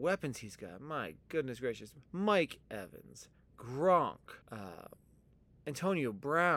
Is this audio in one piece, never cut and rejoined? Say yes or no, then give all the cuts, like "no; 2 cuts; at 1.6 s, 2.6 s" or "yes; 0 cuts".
no; 2 cuts; at 2.1 s, 4.4 s